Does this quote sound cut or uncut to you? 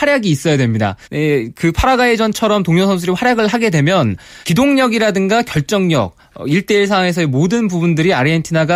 cut